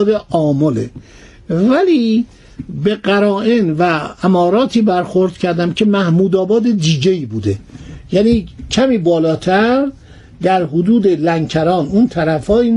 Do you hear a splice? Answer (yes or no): no